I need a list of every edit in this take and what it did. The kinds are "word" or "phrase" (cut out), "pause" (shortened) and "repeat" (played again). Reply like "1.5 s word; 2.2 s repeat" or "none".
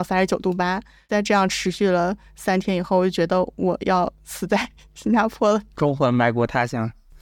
none